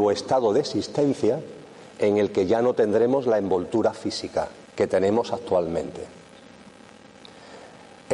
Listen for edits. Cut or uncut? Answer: cut